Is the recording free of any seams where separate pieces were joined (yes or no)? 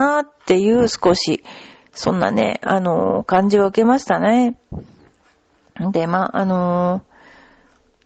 yes